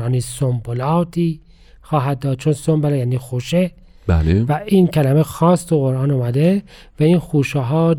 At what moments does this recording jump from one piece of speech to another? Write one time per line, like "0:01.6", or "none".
none